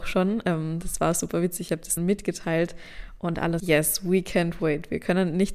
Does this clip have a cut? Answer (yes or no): yes